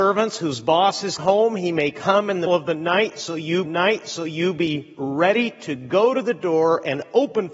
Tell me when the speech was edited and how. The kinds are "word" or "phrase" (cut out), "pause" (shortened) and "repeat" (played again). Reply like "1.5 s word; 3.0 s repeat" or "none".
1.2 s word; 2.5 s word; 3.7 s repeat